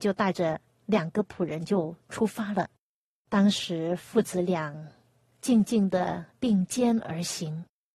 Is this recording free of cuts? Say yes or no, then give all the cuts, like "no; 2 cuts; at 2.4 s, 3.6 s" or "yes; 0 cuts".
yes; 0 cuts